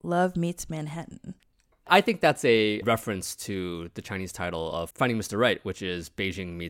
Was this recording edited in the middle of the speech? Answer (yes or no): no